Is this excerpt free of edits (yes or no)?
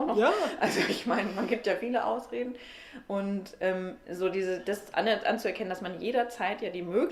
yes